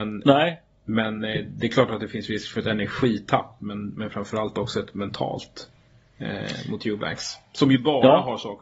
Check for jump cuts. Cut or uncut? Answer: uncut